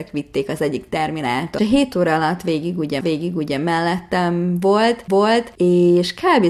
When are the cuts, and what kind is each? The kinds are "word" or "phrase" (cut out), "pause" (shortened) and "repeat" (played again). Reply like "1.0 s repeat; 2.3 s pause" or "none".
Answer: 1.6 s phrase; 3.0 s repeat; 5.1 s repeat